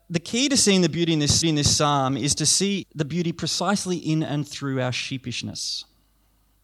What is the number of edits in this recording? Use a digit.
1